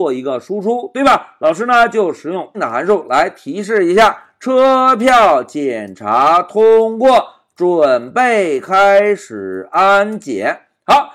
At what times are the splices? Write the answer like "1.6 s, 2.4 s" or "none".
2.5 s